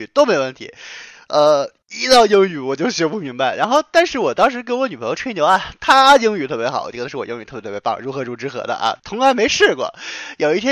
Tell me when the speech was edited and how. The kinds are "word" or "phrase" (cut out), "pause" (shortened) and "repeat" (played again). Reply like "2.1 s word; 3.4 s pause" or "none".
9.0 s pause